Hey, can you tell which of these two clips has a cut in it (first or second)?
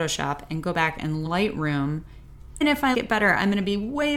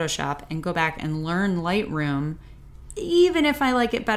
first